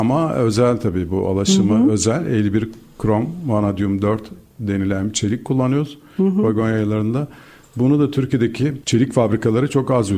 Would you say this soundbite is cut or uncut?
uncut